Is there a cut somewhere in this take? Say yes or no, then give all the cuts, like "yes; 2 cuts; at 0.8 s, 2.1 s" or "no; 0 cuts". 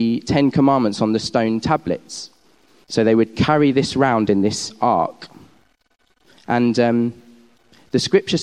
no; 0 cuts